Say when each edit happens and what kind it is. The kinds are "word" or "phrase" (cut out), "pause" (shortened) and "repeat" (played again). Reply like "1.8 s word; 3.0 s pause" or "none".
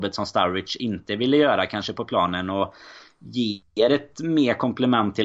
none